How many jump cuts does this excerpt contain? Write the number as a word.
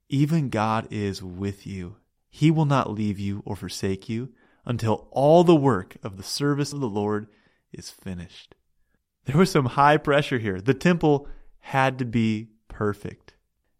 one